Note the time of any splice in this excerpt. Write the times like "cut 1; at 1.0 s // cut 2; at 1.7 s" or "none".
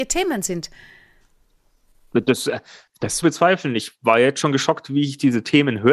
cut 1; at 3.2 s